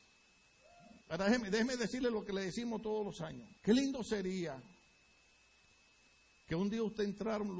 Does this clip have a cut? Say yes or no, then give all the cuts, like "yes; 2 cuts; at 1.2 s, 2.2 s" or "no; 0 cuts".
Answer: yes; 2 cuts; at 1.0 s, 3.6 s